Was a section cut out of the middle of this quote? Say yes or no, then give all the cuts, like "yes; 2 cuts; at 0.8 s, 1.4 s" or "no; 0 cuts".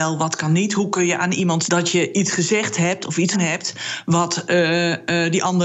yes; 2 cuts; at 1.7 s, 3.3 s